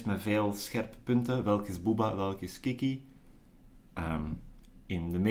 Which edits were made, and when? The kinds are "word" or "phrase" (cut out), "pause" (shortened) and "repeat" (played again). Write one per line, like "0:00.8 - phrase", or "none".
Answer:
none

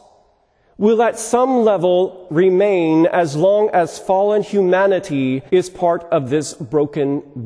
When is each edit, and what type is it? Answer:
0:02.3 - word
0:05.5 - pause

